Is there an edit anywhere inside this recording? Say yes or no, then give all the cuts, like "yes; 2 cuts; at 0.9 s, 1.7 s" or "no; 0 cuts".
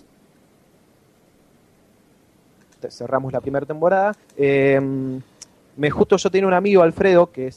yes; 2 cuts; at 4.2 s, 5.9 s